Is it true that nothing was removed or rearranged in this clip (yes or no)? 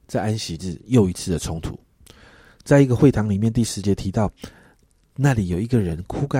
yes